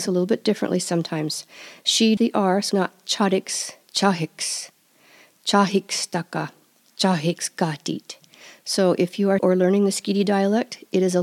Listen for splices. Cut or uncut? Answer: cut